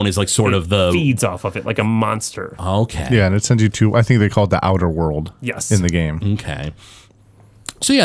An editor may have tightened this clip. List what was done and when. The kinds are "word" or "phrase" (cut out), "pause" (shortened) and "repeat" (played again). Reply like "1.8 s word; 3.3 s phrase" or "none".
none